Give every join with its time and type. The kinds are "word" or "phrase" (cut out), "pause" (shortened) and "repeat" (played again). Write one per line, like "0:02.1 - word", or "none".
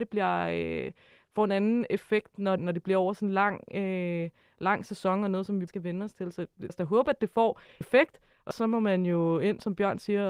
0:02.6 - word
0:05.7 - word
0:06.7 - word
0:07.8 - word
0:08.5 - word